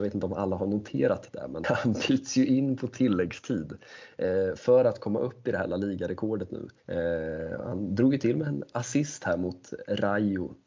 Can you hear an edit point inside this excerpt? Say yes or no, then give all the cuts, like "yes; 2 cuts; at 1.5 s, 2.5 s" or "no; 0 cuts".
yes; 2 cuts; at 1.6 s, 6.8 s